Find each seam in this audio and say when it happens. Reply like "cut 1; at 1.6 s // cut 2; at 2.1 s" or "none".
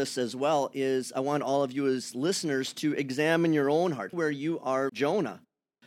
cut 1; at 4.1 s // cut 2; at 4.9 s